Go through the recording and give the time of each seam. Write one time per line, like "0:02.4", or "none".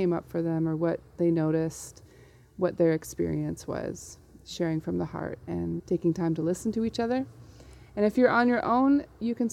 0:05.8